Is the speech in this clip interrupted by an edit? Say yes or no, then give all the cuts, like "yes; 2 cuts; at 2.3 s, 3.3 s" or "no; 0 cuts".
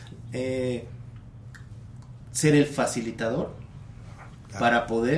no; 0 cuts